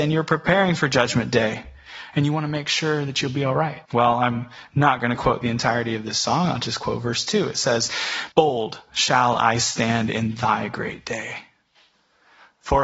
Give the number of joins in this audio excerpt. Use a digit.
2